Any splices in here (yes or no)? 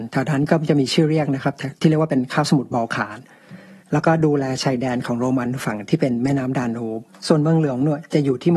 yes